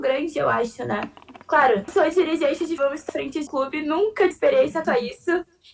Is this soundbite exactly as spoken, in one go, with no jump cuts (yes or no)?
no